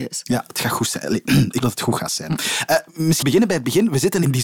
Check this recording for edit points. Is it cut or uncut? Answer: cut